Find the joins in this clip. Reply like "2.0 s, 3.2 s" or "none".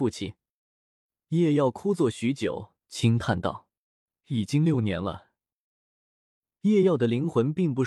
2.8 s